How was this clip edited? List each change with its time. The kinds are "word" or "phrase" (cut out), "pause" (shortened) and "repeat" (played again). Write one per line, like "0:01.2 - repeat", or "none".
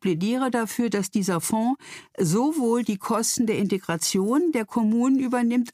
none